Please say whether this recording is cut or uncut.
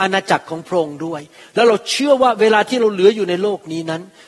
uncut